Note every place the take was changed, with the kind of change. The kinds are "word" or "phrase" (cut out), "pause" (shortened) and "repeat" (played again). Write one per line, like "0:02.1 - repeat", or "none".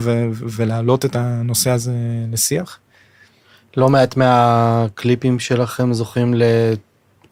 none

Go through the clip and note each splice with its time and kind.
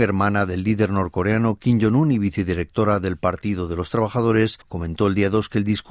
0:04.6 - pause

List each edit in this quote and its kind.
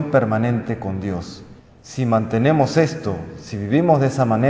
0:01.6 - pause

